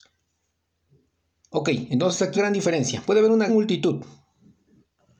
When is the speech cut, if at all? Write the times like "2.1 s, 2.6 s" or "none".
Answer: 2.3 s, 3.5 s